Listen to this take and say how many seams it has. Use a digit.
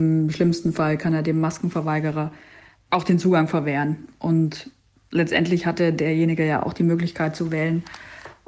0